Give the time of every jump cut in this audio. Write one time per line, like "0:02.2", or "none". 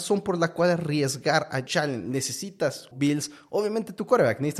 0:01.7
0:02.9